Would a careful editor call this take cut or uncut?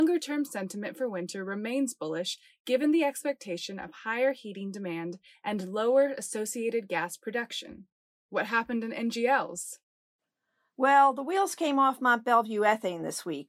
uncut